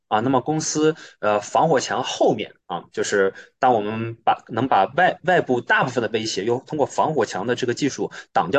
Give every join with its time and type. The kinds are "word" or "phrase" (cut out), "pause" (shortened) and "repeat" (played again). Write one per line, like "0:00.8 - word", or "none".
0:02.6 - pause